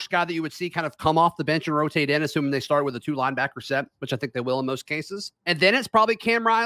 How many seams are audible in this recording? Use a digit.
1